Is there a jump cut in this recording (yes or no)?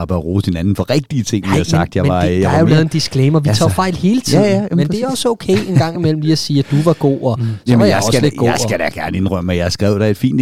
no